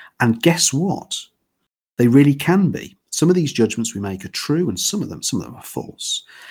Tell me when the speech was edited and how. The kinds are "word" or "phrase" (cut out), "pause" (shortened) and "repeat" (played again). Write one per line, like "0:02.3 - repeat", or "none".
none